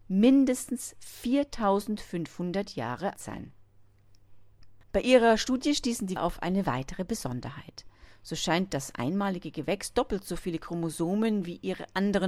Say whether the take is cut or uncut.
cut